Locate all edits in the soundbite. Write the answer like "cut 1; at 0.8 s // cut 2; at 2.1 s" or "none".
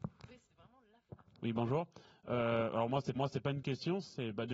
cut 1; at 3.2 s